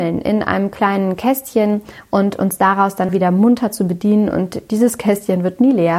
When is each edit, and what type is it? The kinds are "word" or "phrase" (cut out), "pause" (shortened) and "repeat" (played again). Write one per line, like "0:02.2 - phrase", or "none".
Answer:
0:03.1 - word